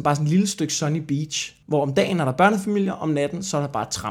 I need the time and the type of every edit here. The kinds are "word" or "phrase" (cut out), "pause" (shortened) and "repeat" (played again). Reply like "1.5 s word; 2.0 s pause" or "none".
1.6 s pause